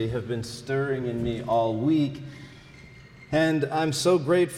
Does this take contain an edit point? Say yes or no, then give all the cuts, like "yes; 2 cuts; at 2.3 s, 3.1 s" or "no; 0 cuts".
no; 0 cuts